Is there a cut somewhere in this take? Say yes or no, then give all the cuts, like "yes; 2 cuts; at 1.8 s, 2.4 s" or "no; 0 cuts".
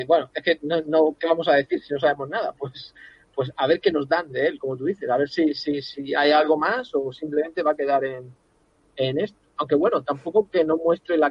no; 0 cuts